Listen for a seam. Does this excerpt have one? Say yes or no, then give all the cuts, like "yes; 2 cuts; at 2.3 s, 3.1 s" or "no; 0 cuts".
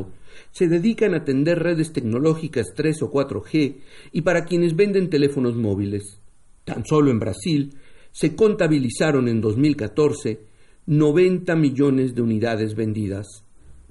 no; 0 cuts